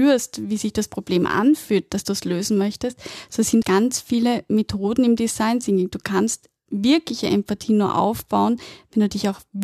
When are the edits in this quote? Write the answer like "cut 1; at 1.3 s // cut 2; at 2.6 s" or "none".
cut 1; at 3.6 s